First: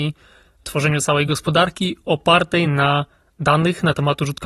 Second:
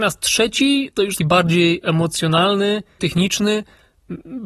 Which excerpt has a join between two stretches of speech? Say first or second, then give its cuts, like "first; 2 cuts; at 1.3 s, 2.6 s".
second; 2 cuts; at 1.2 s, 3.0 s